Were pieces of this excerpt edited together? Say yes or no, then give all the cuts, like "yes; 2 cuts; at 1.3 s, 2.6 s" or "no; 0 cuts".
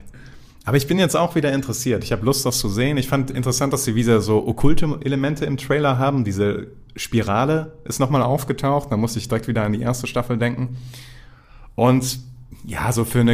no; 0 cuts